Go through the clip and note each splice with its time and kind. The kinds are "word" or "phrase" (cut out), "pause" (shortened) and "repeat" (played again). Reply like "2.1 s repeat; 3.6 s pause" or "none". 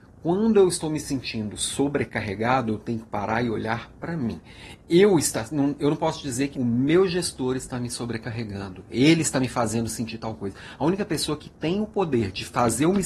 6.5 s word